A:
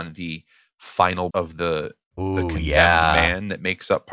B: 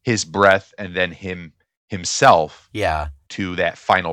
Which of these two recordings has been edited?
A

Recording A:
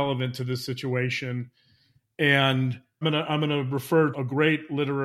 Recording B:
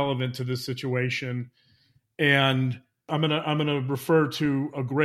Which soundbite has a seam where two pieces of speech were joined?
A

